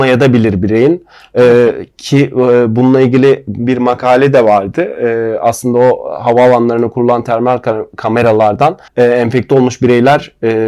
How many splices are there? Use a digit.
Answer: 1